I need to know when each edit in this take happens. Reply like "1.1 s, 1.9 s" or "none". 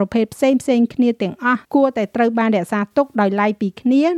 1.6 s